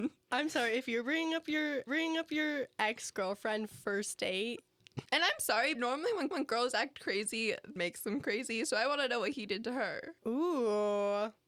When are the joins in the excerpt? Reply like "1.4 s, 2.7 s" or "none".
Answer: 1.9 s, 5.1 s, 5.7 s, 6.3 s, 7.8 s, 10.2 s